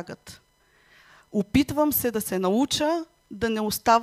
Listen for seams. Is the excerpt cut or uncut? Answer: uncut